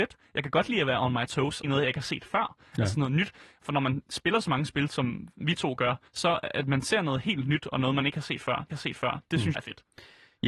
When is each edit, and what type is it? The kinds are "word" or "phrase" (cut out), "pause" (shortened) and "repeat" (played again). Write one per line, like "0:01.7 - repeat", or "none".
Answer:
0:01.6 - word
0:06.1 - pause
0:08.7 - repeat
0:09.5 - word

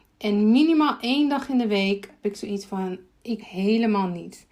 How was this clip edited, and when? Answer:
0:02.2 - word
0:03.4 - word

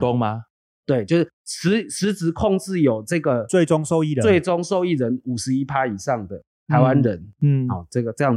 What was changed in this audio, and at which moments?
0:01.3 - pause

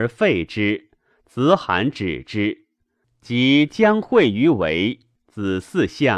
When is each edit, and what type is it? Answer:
none

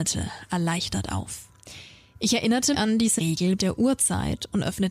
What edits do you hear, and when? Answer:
0:02.7 - word
0:03.2 - word
0:03.6 - word

